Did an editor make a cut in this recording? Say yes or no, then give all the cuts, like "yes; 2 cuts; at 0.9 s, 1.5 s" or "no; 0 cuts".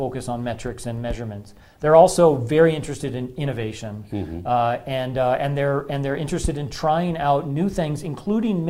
no; 0 cuts